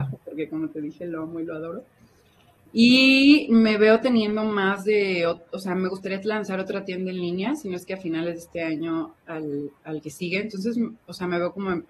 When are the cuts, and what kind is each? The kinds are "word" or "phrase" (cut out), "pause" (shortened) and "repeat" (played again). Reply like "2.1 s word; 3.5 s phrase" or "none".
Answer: none